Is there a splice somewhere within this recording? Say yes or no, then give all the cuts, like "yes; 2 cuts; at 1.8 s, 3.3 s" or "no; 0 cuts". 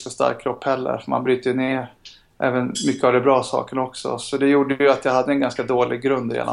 no; 0 cuts